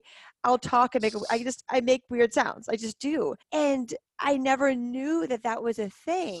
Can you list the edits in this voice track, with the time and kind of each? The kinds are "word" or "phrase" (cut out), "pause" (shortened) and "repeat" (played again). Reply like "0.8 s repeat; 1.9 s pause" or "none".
3.4 s pause

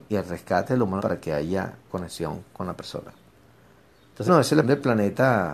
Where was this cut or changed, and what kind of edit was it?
1.0 s word; 1.9 s word; 4.3 s word; 4.6 s word

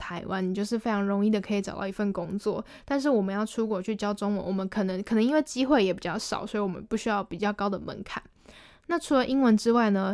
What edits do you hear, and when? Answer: none

